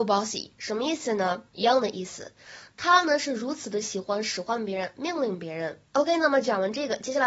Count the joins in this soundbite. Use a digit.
2